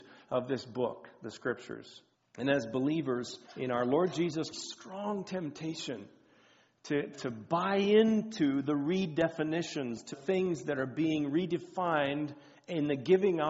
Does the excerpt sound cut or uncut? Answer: cut